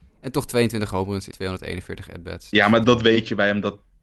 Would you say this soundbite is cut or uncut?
cut